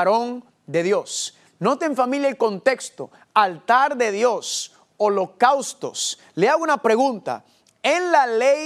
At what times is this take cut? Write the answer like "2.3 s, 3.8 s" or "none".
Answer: none